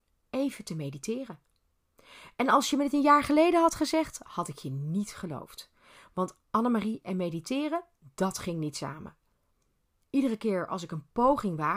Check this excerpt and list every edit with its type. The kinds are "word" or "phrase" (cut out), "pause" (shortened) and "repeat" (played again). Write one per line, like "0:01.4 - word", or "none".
none